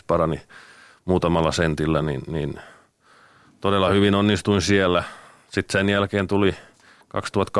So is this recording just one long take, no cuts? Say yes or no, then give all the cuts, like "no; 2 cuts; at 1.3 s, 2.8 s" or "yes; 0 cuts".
yes; 0 cuts